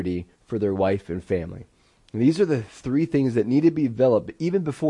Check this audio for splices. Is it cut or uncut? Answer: uncut